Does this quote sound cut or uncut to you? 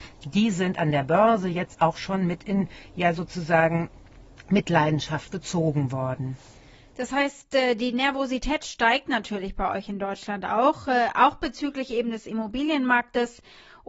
uncut